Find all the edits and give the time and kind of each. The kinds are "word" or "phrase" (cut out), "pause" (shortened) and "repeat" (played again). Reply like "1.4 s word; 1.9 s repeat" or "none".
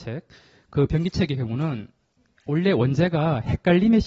none